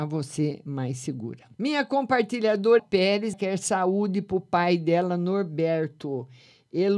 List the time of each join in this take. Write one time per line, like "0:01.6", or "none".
0:01.5
0:02.8
0:03.3